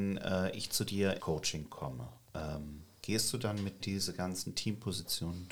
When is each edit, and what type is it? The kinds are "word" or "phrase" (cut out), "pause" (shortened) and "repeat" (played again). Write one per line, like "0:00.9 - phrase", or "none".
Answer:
0:01.2 - word
0:03.8 - word